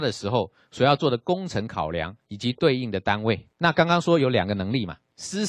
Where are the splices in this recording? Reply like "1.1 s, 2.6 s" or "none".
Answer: 3.5 s